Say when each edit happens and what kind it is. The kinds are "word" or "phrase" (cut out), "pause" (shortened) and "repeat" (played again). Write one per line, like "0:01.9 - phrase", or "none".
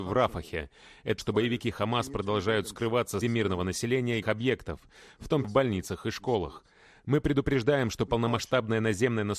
0:01.2 - word
0:03.2 - word
0:04.2 - word
0:05.4 - word